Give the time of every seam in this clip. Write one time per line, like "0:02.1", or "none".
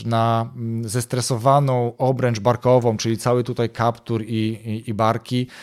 none